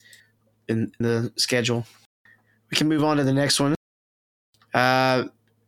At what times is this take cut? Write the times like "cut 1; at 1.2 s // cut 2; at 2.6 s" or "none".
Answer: cut 1; at 1.0 s